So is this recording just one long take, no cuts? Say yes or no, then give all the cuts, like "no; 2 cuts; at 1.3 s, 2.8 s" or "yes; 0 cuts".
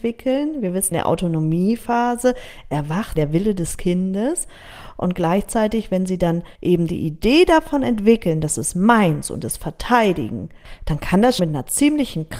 no; 5 cuts; at 0.9 s, 3.2 s, 6.5 s, 9.4 s, 11.4 s